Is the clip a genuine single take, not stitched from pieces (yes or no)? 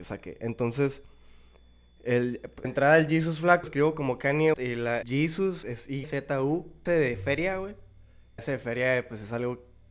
no